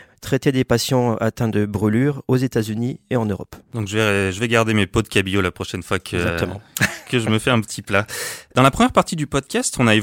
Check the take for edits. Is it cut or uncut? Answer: uncut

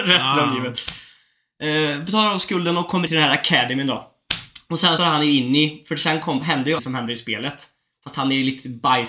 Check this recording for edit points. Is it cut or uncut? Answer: cut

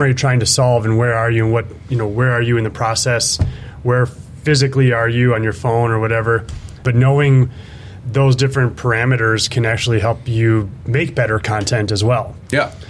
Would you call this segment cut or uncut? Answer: uncut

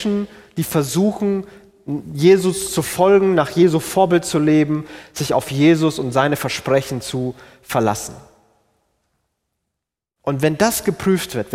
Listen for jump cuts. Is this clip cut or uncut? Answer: uncut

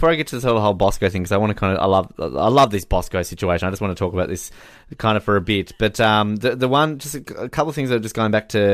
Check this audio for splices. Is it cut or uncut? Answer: uncut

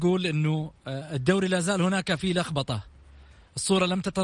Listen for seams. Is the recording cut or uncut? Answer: uncut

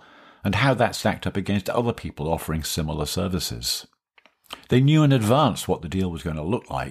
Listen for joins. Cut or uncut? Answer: uncut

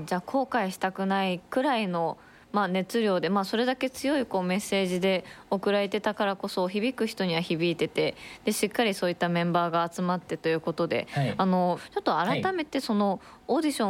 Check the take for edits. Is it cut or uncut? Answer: uncut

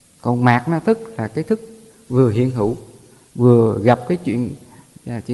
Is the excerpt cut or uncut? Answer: uncut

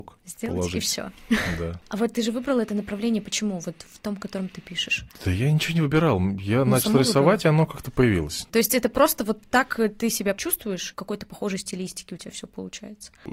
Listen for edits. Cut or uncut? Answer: uncut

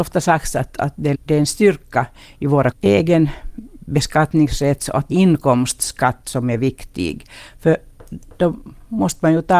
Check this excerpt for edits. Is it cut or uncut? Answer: cut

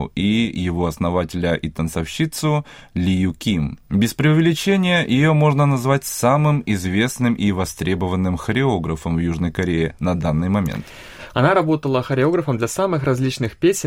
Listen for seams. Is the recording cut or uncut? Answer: cut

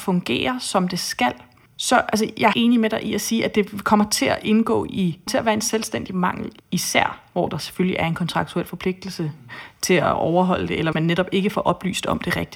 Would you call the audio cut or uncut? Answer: cut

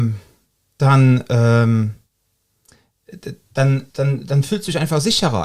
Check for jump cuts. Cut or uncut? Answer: cut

